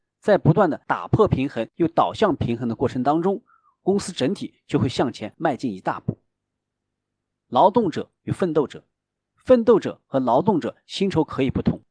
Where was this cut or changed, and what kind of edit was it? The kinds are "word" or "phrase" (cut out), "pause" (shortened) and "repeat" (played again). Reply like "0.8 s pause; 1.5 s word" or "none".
none